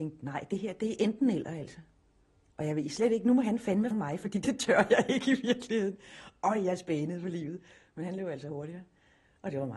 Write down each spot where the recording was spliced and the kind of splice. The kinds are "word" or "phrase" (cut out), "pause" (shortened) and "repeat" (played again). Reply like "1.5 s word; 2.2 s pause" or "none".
3.9 s word; 4.4 s word

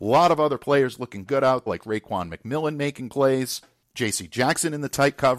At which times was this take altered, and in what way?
1.7 s word

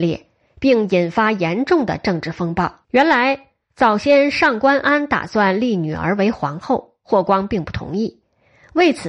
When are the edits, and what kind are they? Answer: 2.8 s pause

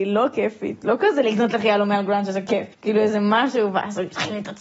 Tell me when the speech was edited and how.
2.7 s pause

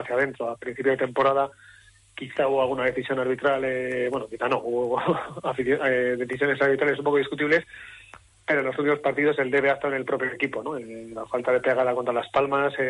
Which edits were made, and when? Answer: none

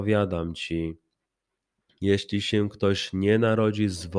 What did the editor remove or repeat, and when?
none

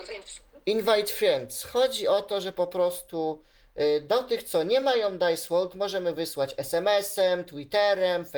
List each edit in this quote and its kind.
none

